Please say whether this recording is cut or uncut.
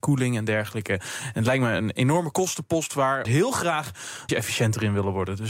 cut